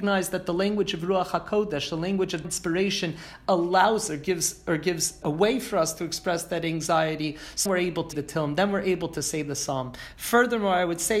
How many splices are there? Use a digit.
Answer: 5